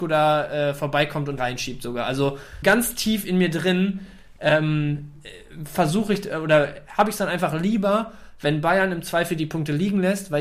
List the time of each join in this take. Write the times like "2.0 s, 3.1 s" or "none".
1.4 s, 2.6 s